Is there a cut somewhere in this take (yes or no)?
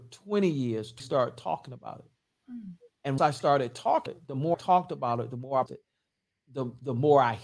yes